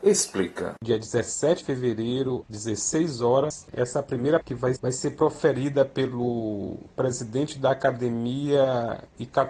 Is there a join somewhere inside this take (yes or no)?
yes